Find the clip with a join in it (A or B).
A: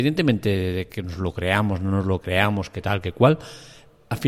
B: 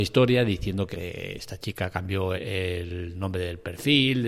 B